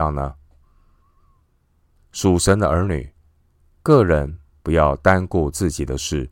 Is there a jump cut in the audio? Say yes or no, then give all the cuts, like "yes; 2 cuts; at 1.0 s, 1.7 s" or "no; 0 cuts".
no; 0 cuts